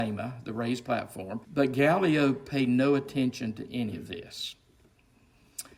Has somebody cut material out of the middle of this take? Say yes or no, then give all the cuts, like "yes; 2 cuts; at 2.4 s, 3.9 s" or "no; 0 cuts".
yes; 1 cut; at 1.4 s